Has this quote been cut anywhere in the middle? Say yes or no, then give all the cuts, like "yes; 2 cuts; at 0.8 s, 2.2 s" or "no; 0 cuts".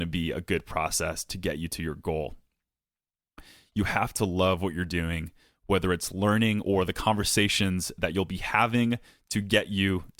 no; 0 cuts